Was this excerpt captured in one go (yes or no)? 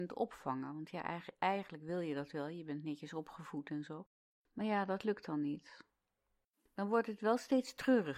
yes